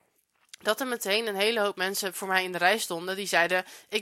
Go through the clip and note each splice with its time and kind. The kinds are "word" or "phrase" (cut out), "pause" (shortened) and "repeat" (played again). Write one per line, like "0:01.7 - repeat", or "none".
none